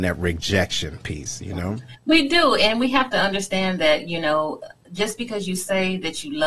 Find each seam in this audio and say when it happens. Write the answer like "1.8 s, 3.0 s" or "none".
none